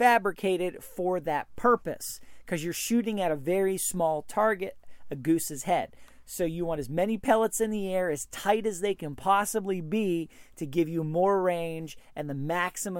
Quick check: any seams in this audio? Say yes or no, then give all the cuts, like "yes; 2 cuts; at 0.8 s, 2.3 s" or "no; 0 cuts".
no; 0 cuts